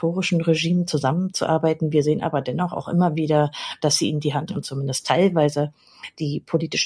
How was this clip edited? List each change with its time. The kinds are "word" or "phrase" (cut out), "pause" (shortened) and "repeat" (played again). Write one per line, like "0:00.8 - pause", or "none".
0:04.5 - word